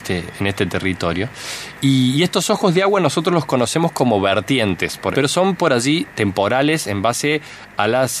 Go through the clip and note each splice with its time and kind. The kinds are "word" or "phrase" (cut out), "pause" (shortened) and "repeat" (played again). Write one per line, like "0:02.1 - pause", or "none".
0:05.1 - word
0:06.1 - word